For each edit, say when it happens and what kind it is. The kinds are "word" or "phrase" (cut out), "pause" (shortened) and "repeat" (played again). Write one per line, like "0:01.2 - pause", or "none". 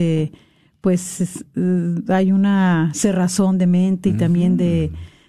none